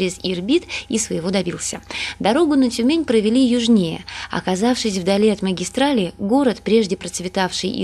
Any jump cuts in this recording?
no; 0 cuts

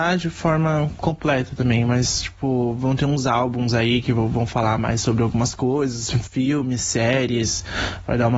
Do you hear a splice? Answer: no; 0 cuts

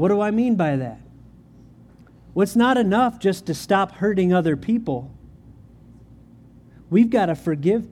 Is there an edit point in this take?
no; 0 cuts

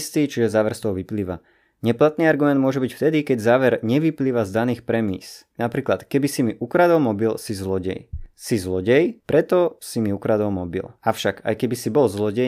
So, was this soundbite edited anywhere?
no; 0 cuts

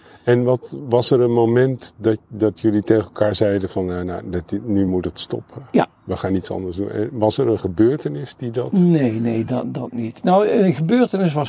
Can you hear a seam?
no; 0 cuts

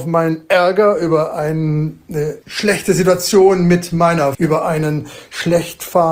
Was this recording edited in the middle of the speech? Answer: yes; 2 cuts; at 2.4 s, 4.3 s

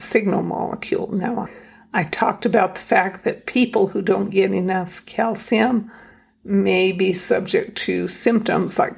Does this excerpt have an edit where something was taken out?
no; 0 cuts

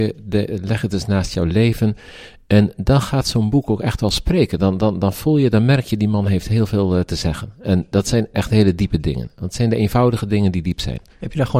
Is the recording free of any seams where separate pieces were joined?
yes; 0 cuts

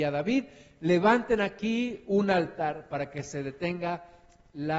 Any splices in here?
no; 0 cuts

